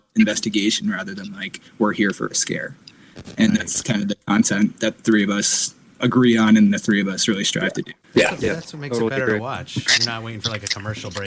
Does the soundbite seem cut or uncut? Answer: cut